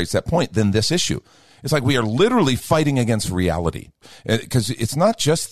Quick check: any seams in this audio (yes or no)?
no